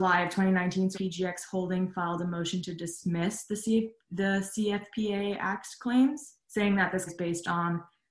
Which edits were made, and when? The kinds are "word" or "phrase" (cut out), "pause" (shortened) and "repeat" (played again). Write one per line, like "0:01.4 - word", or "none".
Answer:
0:00.9 - phrase
0:06.4 - pause
0:07.1 - word